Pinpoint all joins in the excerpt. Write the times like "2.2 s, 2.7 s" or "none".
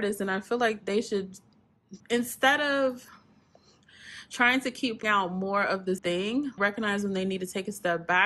2.0 s, 5.0 s, 6.0 s, 6.6 s

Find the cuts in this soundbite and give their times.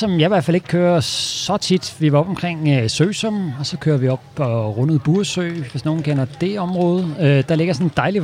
none

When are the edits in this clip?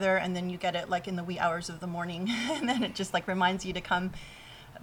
none

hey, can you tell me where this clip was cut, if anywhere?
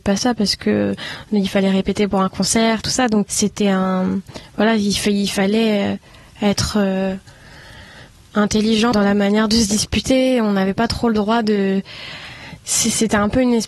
3.3 s, 8.9 s

